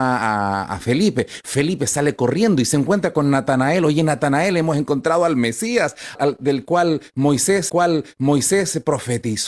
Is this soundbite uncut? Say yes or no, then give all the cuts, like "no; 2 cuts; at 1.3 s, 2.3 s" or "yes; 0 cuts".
no; 2 cuts; at 6.1 s, 7.7 s